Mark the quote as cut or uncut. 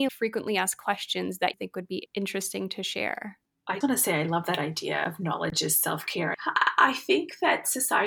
cut